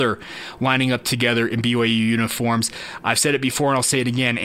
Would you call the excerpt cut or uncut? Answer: uncut